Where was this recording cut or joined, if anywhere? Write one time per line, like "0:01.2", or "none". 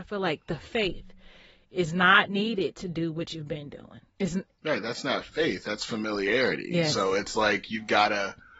0:04.1

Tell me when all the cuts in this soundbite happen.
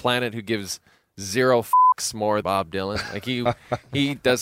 0:02.4

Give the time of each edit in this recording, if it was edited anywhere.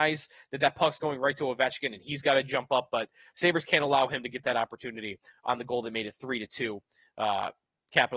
none

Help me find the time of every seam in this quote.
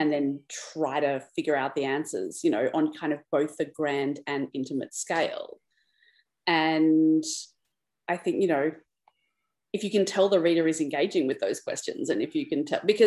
0:07.7

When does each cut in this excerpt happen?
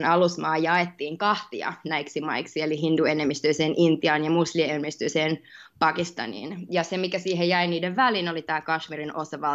none

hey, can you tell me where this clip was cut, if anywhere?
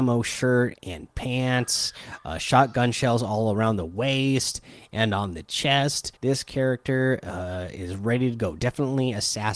0:06.2

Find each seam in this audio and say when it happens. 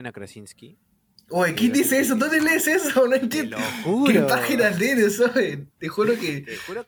none

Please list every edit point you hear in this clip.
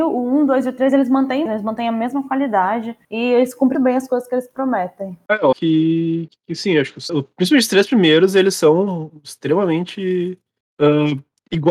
0:01.5
0:03.7
0:05.5
0:06.3
0:07.1

